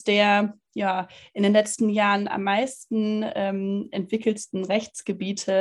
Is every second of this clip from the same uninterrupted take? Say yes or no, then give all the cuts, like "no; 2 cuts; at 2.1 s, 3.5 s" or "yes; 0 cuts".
yes; 0 cuts